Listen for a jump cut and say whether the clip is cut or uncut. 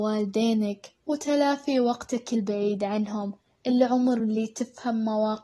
uncut